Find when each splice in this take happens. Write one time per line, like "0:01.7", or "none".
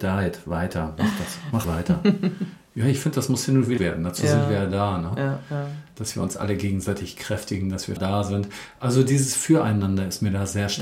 0:01.6
0:03.8
0:08.0